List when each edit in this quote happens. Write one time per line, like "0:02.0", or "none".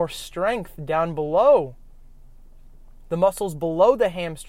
none